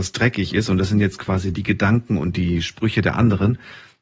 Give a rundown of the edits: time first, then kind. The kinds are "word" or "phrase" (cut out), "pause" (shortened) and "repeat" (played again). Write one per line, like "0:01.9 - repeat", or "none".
none